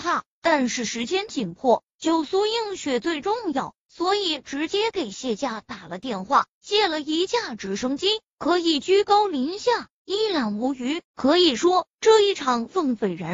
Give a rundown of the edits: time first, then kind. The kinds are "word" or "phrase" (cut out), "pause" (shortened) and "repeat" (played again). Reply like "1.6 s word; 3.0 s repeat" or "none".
11.1 s pause